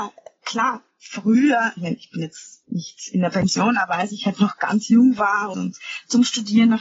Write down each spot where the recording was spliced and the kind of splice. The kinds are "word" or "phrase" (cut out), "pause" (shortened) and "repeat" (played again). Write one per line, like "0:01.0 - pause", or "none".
0:02.6 - pause
0:05.5 - word